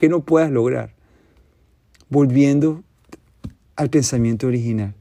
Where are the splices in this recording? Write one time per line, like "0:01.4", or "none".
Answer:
0:03.7